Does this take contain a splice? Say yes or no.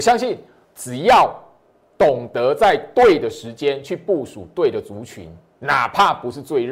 no